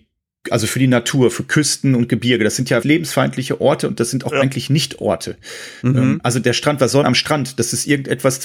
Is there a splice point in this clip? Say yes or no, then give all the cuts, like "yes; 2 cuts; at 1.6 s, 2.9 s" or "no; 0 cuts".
yes; 2 cuts; at 2.8 s, 7.0 s